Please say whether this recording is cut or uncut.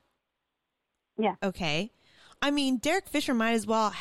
uncut